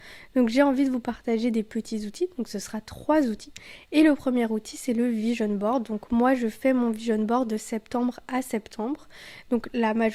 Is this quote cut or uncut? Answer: uncut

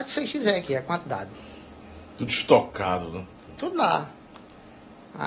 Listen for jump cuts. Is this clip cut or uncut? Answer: uncut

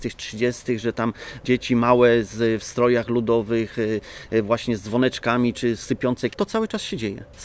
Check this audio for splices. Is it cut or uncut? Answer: cut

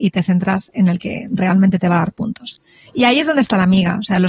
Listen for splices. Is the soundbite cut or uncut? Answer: uncut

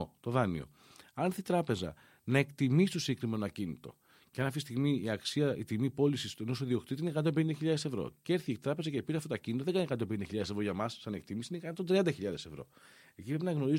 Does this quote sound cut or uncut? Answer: uncut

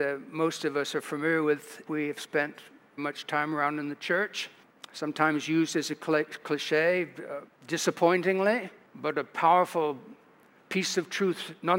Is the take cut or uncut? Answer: cut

